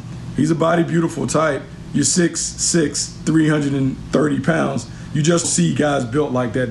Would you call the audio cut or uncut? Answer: cut